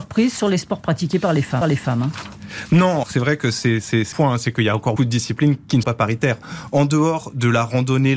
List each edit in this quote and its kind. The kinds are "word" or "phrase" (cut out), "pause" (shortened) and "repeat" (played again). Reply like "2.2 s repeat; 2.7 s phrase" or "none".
1.6 s repeat; 3.0 s word; 4.1 s word; 5.0 s word; 5.8 s word